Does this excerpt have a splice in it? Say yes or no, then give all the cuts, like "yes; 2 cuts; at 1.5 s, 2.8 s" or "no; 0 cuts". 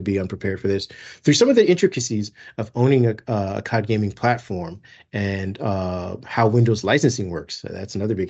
no; 0 cuts